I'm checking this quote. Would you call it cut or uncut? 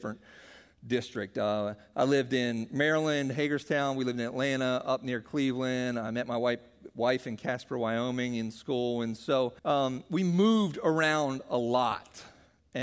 cut